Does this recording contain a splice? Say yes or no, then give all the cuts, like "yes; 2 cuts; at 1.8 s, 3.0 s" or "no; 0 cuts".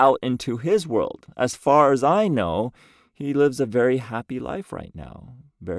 no; 0 cuts